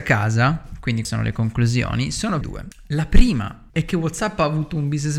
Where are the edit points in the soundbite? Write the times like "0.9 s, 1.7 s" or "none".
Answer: 1.0 s, 2.4 s, 3.7 s